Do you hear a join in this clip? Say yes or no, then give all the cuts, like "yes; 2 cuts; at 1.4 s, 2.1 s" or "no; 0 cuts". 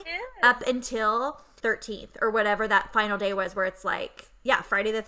yes; 1 cut; at 1.6 s